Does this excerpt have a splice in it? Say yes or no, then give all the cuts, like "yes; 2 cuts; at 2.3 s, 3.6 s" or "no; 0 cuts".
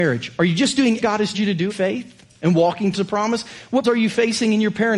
yes; 5 cuts; at 1.0 s, 1.3 s, 1.7 s, 2.9 s, 3.8 s